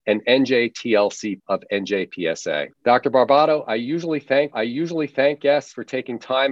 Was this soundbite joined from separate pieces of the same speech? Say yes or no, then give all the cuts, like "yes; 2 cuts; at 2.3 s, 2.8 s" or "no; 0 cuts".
yes; 3 cuts; at 1.4 s, 2.7 s, 4.5 s